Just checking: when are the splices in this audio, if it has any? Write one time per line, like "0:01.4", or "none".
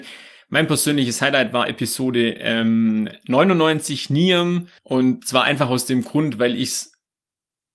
0:04.8